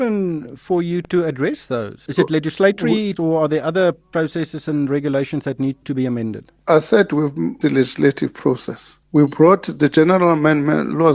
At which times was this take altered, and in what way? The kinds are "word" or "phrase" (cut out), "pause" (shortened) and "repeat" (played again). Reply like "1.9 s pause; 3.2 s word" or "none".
3.2 s word; 5.8 s word; 6.6 s pause; 7.6 s word; 9.0 s pause